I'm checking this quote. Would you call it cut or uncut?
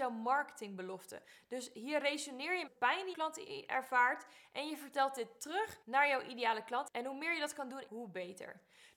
cut